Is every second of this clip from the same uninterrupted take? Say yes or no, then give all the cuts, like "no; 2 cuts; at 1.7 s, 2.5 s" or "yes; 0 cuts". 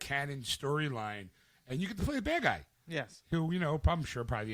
yes; 0 cuts